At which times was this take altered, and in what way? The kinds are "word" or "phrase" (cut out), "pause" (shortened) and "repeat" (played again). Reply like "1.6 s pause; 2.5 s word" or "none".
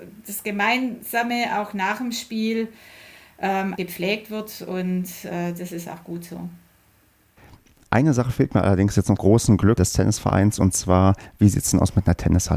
3.8 s word; 9.2 s phrase; 9.8 s word